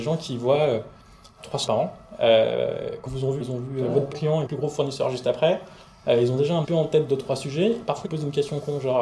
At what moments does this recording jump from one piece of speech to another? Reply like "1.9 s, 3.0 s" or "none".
1.7 s, 3.1 s, 3.4 s, 4.1 s, 4.5 s, 6.6 s, 8.0 s

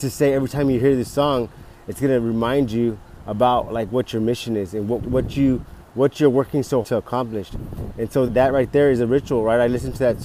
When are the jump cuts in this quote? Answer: 5.0 s, 6.8 s, 8.3 s

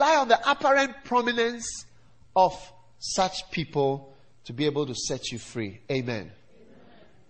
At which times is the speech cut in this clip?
none

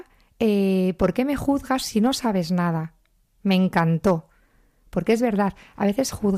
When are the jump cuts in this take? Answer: none

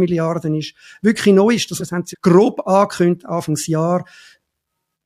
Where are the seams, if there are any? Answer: 1.8 s, 2.1 s

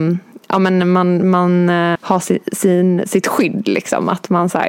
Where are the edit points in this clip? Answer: 2.0 s

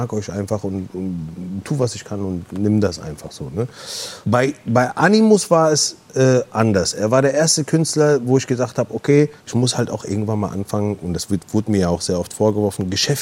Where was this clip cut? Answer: 4.2 s, 9.4 s

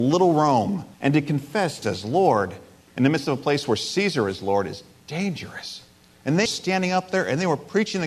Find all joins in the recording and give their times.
0.9 s, 1.8 s, 6.4 s

